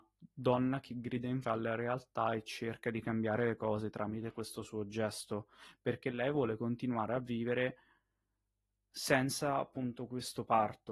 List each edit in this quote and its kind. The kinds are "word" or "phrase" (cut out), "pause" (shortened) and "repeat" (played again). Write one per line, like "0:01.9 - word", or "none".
0:01.4 - word